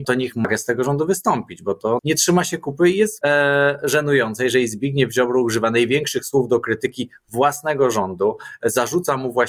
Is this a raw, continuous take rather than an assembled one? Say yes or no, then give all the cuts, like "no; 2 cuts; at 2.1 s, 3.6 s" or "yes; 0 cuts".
no; 2 cuts; at 2.0 s, 3.2 s